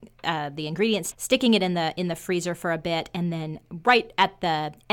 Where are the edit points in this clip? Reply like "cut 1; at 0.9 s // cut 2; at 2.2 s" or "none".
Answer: cut 1; at 1.1 s